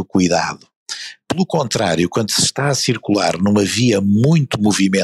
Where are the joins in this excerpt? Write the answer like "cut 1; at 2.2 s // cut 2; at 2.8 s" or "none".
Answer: none